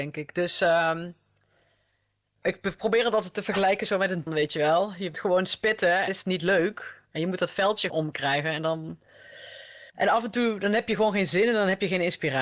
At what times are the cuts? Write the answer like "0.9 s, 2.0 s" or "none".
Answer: 2.4 s, 4.3 s, 5.1 s, 6.1 s, 7.1 s, 7.9 s, 9.9 s

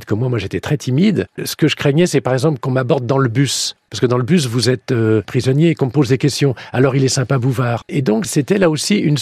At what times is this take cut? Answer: none

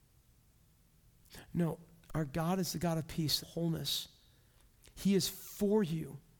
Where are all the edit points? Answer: 3.4 s

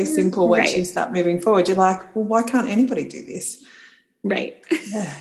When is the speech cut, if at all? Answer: none

